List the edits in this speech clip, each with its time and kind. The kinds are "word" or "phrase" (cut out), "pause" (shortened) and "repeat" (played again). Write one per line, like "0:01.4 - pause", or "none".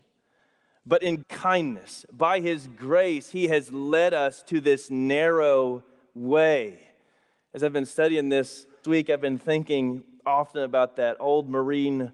0:01.2 - word
0:08.8 - word

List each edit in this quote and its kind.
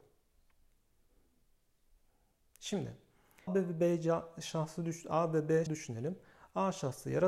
0:03.5 - word
0:05.7 - word

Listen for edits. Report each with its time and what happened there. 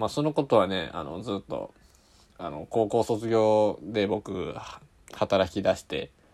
none

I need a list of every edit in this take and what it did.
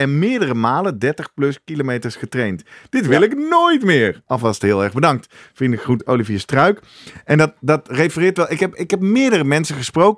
none

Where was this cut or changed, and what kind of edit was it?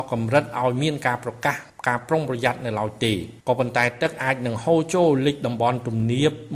0:03.4 - pause

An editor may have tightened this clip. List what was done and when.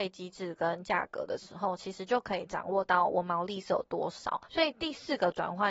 0:04.4 - pause

